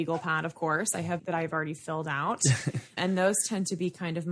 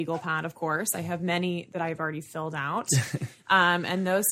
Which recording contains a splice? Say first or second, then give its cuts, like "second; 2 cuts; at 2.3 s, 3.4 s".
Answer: first; 2 cuts; at 1.2 s, 3.0 s